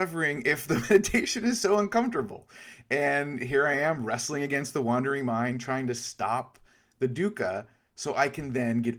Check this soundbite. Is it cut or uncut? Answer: uncut